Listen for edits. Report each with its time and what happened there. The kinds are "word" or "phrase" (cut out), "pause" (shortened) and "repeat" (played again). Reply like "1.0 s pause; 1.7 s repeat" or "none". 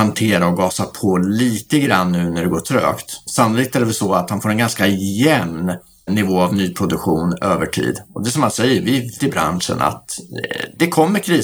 9.2 s word